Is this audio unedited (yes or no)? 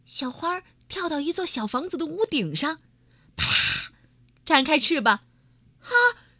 yes